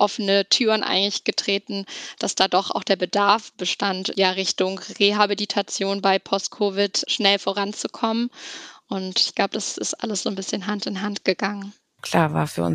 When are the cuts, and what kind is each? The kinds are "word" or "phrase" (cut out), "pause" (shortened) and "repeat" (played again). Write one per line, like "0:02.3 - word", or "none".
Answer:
none